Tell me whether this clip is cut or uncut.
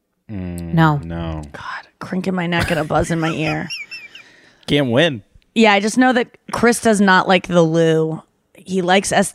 uncut